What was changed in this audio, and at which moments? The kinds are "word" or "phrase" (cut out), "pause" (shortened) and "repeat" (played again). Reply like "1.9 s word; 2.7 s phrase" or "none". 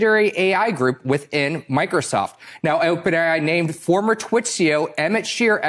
none